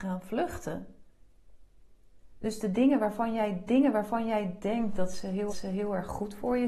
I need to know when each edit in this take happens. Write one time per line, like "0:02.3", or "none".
0:03.7
0:05.5

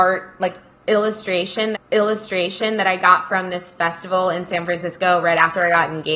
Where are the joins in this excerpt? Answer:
0:01.7

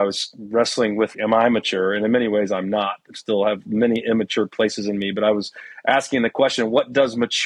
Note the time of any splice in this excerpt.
0:01.1

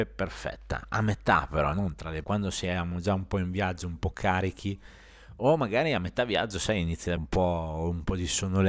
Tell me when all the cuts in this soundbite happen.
0:02.2
0:07.2

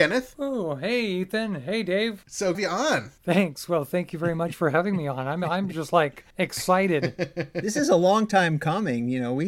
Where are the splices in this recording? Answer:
0:02.5
0:06.3

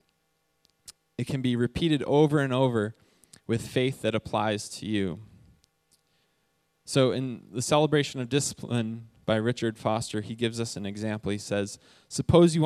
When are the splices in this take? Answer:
none

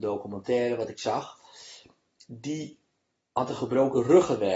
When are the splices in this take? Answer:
none

